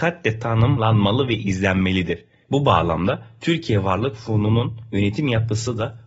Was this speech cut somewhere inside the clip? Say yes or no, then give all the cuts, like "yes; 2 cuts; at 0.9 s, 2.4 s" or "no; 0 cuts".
no; 0 cuts